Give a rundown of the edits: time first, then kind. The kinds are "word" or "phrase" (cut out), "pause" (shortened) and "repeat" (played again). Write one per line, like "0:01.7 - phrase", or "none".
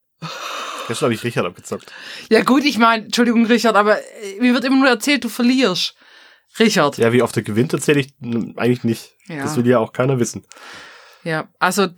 none

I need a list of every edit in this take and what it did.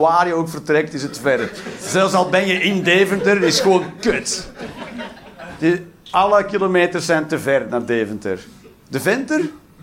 none

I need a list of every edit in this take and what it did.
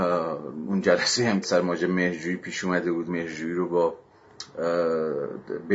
0:01.4 - word
0:03.1 - word

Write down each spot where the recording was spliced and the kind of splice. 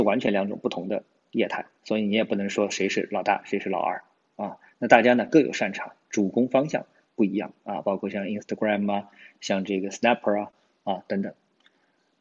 none

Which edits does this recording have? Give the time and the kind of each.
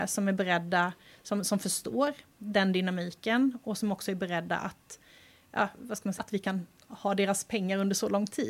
0:06.2 - phrase

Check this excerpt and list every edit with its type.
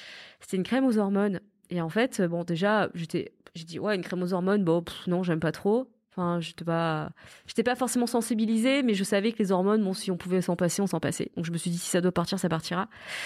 none

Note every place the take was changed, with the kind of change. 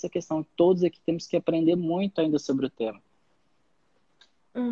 none

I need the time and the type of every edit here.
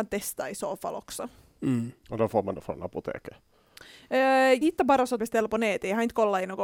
0:04.6 - word
0:05.2 - phrase

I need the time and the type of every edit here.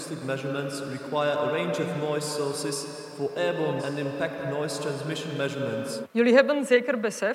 0:03.8 - word

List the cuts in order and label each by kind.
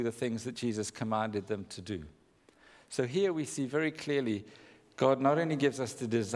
none

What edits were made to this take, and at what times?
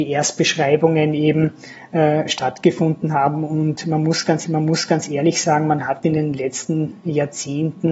0:04.4 - repeat

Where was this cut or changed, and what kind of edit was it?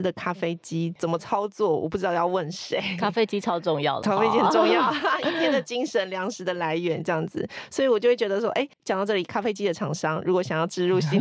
0:04.0 - word
0:08.7 - pause

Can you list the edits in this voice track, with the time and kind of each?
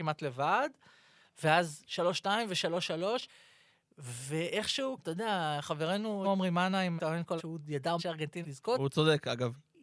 0:05.0 - word
0:06.2 - word
0:07.0 - word
0:07.4 - word
0:08.0 - word
0:08.4 - word

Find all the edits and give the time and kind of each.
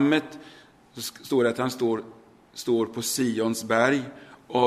none

